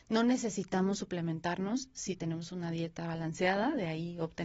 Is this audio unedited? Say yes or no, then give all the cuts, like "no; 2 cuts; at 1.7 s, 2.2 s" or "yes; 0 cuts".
yes; 0 cuts